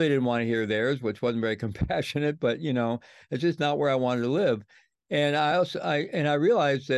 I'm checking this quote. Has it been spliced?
no; 0 cuts

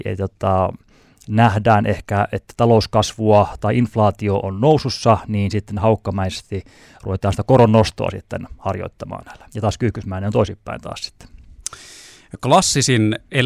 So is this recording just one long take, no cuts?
no; 2 cuts; at 4.4 s, 9.5 s

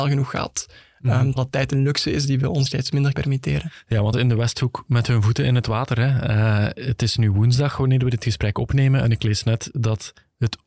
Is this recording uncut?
no; 4 cuts; at 1.4 s, 2.7 s, 3.1 s, 4.1 s

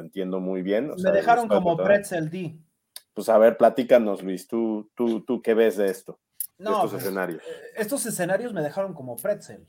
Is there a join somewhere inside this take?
yes; 2 cuts; at 5.4 s, 6.5 s

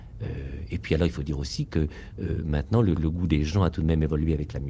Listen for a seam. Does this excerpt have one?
yes; 1 cut; at 2.9 s

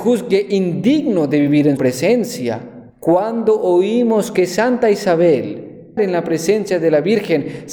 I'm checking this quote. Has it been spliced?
yes; 3 cuts; at 1.8 s, 2.9 s, 6.0 s

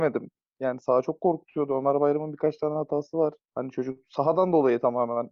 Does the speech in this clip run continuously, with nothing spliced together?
yes; 0 cuts

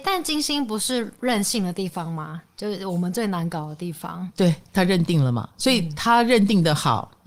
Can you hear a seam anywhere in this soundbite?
no; 0 cuts

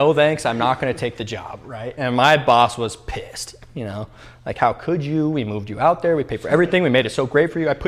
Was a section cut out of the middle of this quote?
no; 0 cuts

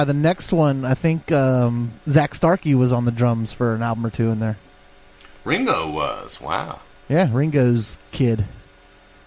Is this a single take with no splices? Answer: no; 1 cut; at 6.9 s

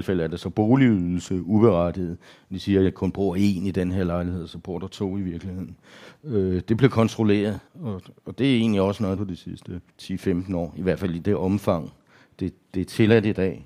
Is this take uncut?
no; 3 cuts; at 7.7 s, 9.2 s, 9.9 s

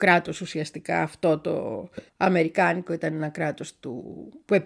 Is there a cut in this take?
yes; 1 cut; at 2.1 s

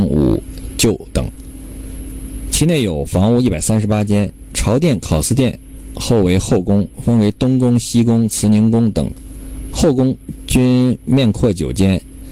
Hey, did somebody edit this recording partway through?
no; 0 cuts

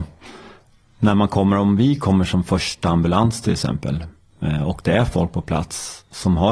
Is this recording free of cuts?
yes; 0 cuts

